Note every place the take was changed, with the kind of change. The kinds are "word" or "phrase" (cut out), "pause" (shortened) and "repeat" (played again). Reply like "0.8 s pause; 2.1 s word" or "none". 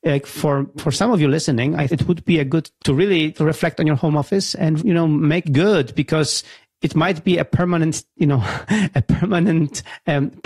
1.9 s word; 2.8 s word; 3.4 s word; 4.8 s word; 5.4 s word